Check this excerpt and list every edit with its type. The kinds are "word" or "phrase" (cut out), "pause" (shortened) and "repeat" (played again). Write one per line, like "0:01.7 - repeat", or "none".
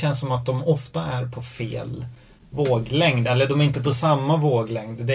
none

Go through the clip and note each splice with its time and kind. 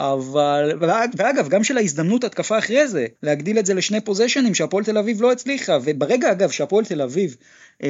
0:03.2 - pause

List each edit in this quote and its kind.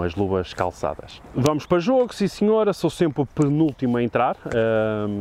none

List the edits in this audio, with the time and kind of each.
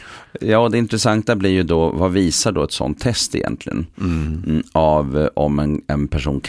none

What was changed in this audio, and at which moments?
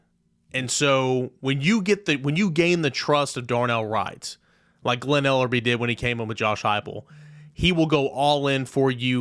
none

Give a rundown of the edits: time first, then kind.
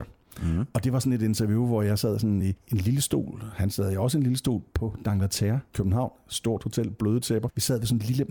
none

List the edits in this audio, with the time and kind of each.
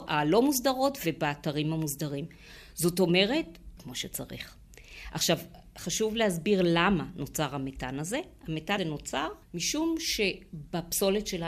0:03.8 - phrase
0:08.8 - word
0:09.4 - pause

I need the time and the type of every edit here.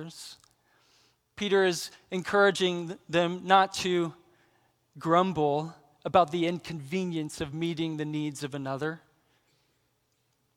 none

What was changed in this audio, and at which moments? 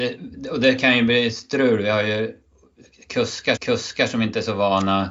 0:03.6 - repeat

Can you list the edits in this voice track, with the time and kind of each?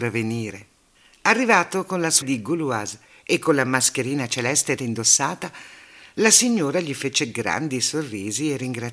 0:00.9 - pause
0:02.2 - word
0:04.8 - word

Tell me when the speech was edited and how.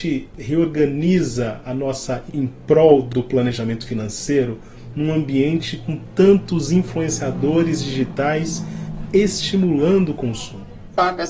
0:02.3 - word

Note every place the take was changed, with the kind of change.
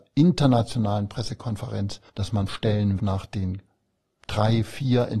0:02.1 - pause
0:02.5 - word
0:03.0 - word

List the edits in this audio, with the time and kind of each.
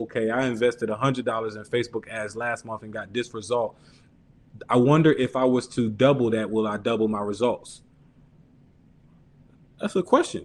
none

